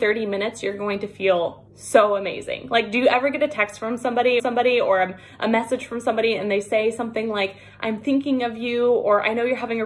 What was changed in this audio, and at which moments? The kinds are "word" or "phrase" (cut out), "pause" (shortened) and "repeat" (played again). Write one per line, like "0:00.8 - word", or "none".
0:01.7 - pause
0:04.4 - repeat